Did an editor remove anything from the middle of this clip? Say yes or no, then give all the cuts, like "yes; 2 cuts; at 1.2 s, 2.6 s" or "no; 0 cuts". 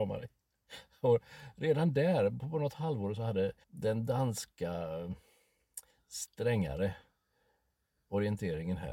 yes; 2 cuts; at 3.6 s, 5.9 s